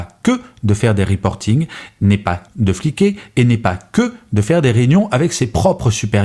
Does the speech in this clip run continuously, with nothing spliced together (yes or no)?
no